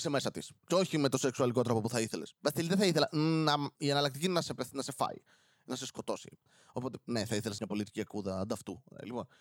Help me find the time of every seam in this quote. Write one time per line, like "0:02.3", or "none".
0:03.7
0:07.6